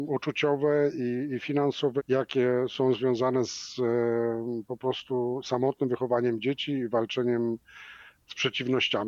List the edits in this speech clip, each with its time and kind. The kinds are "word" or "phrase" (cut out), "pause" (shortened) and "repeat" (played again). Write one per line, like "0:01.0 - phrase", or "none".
0:02.0 - word